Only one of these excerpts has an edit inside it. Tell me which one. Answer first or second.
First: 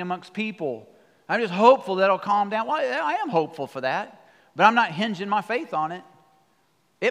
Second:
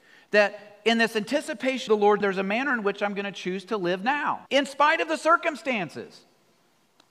second